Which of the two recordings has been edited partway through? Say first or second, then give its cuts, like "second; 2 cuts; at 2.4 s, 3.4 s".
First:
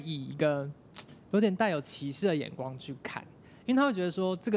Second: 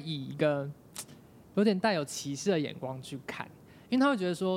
first; 1 cut; at 1.2 s